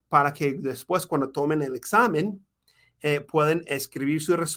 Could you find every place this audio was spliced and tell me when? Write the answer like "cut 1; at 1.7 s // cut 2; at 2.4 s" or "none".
none